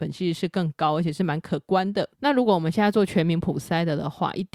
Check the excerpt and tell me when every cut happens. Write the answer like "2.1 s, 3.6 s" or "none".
2.1 s